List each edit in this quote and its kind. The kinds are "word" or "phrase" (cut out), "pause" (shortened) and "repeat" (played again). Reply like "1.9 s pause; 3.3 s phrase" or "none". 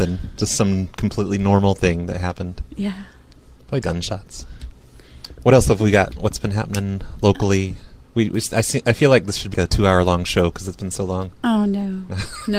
3.8 s word; 8.0 s pause; 9.5 s word